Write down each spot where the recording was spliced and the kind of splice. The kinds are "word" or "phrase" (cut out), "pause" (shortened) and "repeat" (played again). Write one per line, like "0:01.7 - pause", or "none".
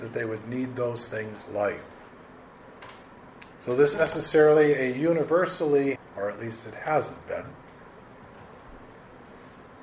0:01.4 - phrase
0:03.5 - pause
0:03.9 - word
0:06.0 - phrase

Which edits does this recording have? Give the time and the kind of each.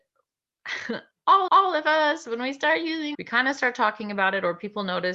0:01.5 - repeat
0:03.1 - word

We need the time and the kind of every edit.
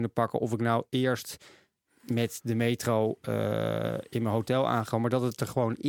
none

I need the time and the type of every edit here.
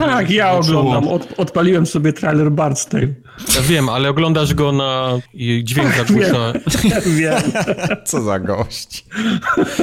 0:05.3 - phrase

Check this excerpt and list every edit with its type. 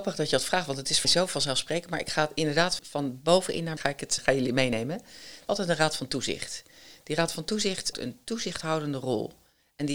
0:01.0 - word
0:02.8 - word
0:03.8 - word
0:04.2 - word
0:05.5 - word
0:07.9 - word

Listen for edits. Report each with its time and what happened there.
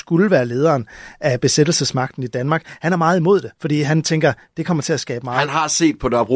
0:03.5 - pause

